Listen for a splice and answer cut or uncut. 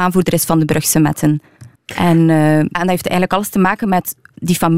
cut